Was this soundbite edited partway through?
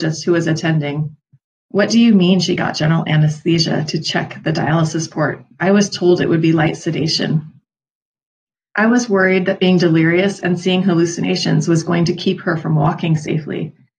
no; 0 cuts

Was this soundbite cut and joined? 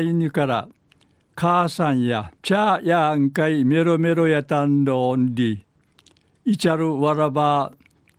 yes; 1 cut; at 2.3 s

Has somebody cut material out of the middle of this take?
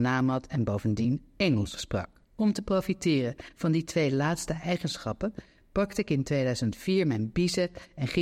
yes; 1 cut; at 2.2 s

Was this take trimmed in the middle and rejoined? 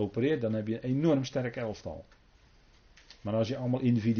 no; 0 cuts

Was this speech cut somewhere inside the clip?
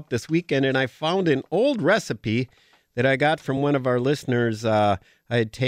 no; 0 cuts

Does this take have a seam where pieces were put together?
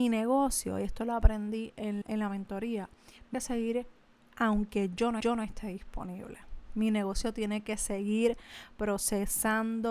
yes; 4 cuts; at 2.0 s, 3.3 s, 4.1 s, 5.2 s

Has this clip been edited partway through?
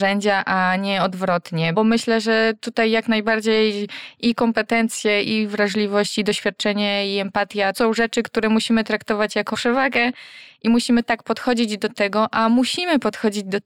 yes; 3 cuts; at 1.7 s, 7.7 s, 9.5 s

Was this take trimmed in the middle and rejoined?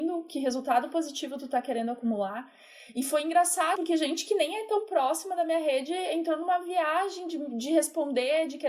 yes; 1 cut; at 3.8 s

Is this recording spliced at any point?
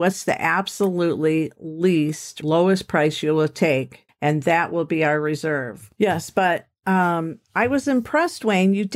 yes; 2 cuts; at 2.4 s, 4.1 s

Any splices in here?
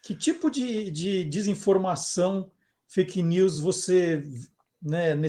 no; 0 cuts

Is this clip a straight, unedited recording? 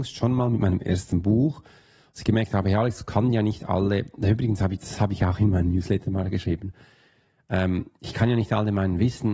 yes; 0 cuts

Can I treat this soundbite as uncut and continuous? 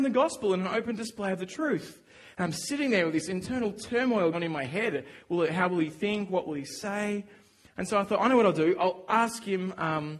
no; 2 cuts; at 4.3 s, 9.1 s

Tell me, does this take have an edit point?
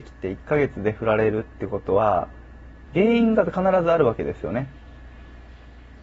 yes; 1 cut; at 2.9 s

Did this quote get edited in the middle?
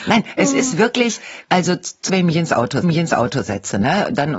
yes; 3 cuts; at 1.4 s, 2.1 s, 2.8 s

